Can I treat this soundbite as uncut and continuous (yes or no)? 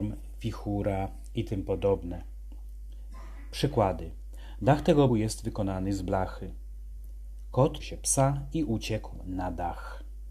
no